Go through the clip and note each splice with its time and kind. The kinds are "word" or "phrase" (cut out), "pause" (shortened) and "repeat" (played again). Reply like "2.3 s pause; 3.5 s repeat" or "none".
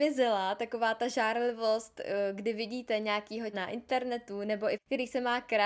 3.5 s word; 4.7 s phrase

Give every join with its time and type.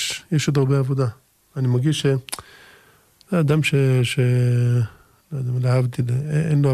none

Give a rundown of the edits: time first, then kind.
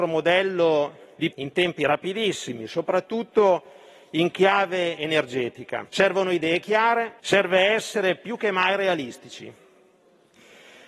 1.3 s word; 5.9 s pause; 7.2 s pause

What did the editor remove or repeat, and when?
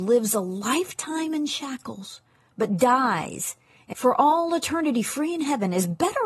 3.9 s word

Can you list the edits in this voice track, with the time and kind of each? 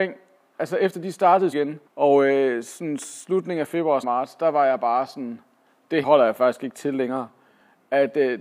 1.5 s word; 1.9 s pause; 4.0 s phrase; 6.0 s phrase

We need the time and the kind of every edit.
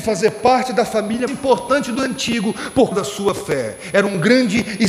1.3 s word; 2.0 s word; 2.9 s word

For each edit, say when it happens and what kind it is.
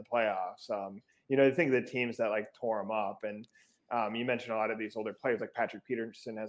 none

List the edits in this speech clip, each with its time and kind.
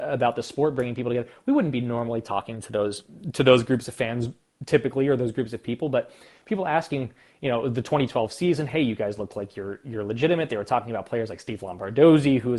none

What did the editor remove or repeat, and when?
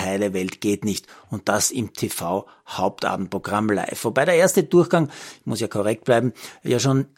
none

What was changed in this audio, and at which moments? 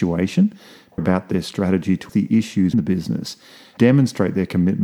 1.0 s word; 2.1 s word; 2.7 s word; 3.8 s word

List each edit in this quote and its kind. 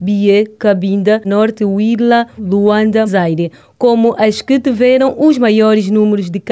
1.2 s phrase; 2.4 s word; 3.1 s phrase

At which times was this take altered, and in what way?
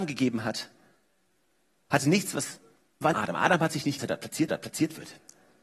3.1 s phrase; 4.0 s phrase; 4.5 s repeat

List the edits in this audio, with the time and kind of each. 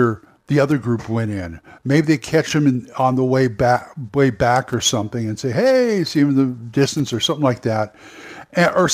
none

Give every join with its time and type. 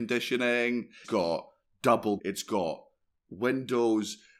1.0 s word; 2.2 s word

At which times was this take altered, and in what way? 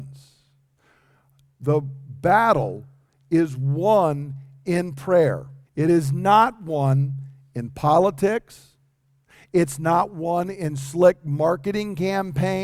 5.6 s pause

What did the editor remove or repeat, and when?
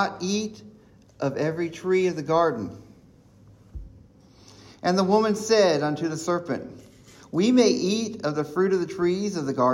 none

